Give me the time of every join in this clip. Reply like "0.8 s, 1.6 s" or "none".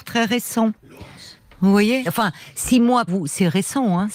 1.4 s, 2.1 s, 3.1 s

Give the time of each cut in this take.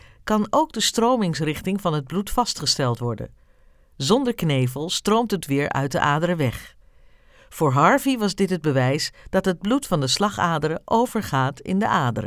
5.4 s

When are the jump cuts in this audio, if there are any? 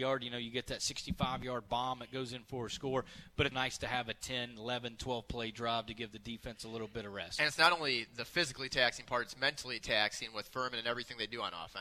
3.5 s

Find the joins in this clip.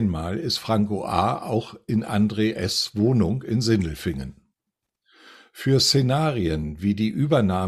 none

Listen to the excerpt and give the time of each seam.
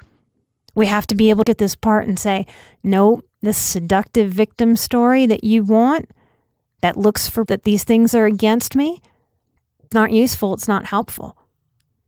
1.4 s, 7.5 s, 9.9 s

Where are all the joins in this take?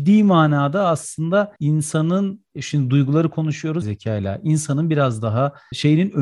1.6 s, 3.8 s

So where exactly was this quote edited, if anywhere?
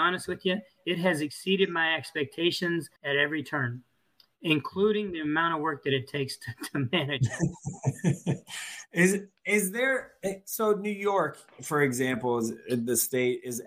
3.0 s

